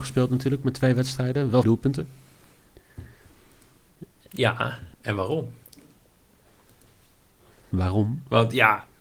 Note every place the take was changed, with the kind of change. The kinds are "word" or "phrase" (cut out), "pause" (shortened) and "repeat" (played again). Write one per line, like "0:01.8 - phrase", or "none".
0:01.6 - word
0:04.9 - pause